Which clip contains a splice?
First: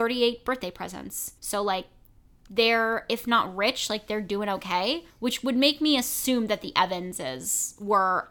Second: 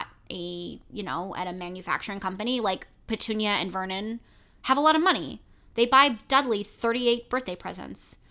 first; 2 cuts; at 1.4 s, 5.1 s

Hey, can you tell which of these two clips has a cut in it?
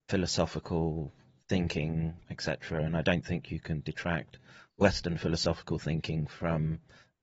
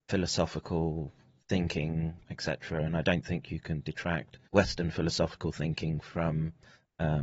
second; 1 cut; at 4.5 s

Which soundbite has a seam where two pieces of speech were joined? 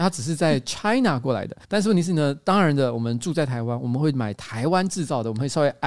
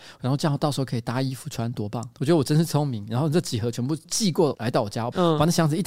first; 1 cut; at 1.6 s

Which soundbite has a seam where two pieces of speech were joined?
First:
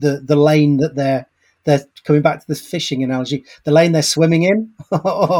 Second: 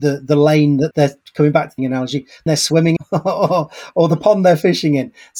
second; 4 cuts; at 0.9 s, 1.8 s, 2.5 s, 3.0 s

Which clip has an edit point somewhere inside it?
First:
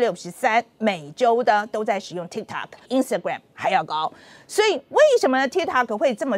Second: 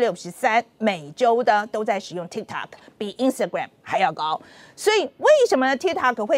first; 1 cut; at 2.9 s

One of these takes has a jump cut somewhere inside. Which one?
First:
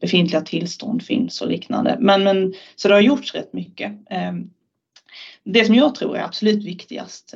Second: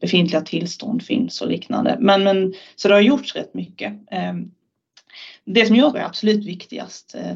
second; 1 cut; at 5.9 s

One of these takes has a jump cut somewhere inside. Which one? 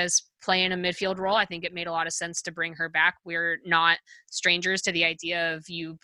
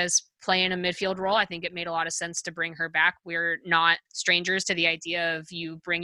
second; 1 cut; at 4.1 s

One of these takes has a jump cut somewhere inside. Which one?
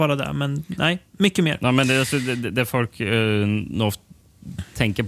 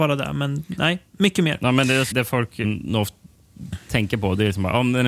second; 2 cuts; at 2.1 s, 2.6 s

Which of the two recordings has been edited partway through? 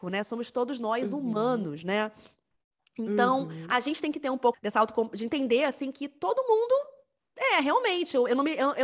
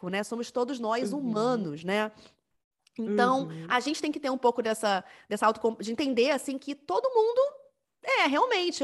first; 1 cut; at 4.5 s

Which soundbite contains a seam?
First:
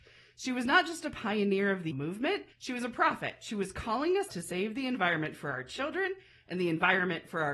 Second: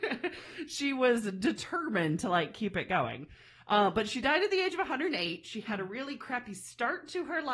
first; 3 cuts; at 1.9 s, 2.5 s, 4.3 s

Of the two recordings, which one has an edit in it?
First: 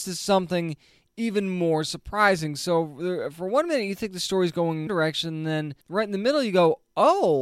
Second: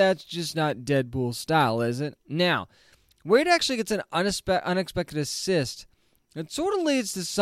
first; 2 cuts; at 4.9 s, 5.8 s

